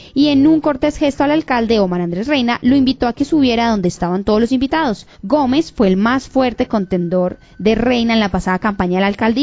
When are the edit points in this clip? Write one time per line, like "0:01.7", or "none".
0:05.1